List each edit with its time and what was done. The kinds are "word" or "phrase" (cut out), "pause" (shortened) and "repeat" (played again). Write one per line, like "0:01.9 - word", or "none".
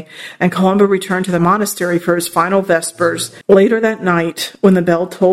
0:03.4 - pause